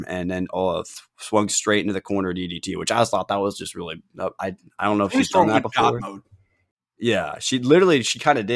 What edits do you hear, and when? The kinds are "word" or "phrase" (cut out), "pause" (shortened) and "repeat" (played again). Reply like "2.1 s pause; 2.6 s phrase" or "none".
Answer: none